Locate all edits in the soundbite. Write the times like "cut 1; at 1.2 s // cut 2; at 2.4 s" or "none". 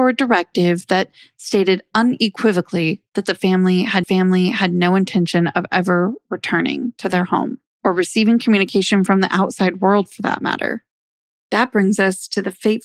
cut 1; at 4.0 s